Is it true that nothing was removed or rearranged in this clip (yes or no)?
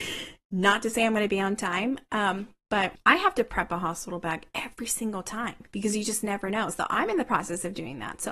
yes